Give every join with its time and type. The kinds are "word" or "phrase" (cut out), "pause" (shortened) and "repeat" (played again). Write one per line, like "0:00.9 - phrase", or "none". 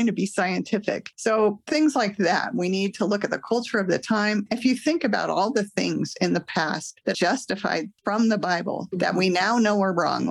0:07.1 - phrase